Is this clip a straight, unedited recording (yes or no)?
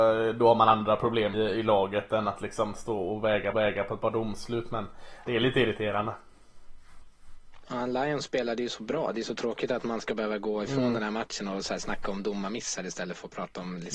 no